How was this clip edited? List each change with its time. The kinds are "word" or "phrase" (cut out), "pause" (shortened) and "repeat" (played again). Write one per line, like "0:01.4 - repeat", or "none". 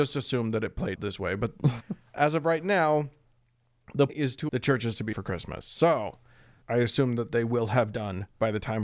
0:00.9 - word
0:01.8 - word
0:02.1 - word
0:04.1 - word
0:04.5 - word
0:05.1 - word
0:06.6 - word